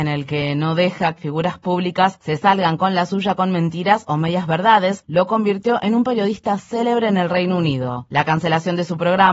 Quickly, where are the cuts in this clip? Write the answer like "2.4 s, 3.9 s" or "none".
1.2 s